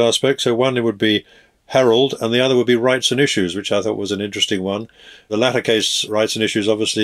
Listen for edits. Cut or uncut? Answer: uncut